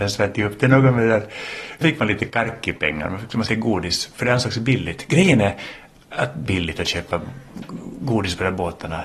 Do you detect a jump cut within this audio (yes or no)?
yes